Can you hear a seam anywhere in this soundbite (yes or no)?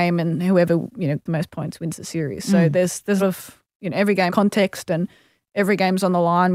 yes